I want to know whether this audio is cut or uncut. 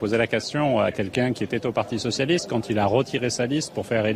uncut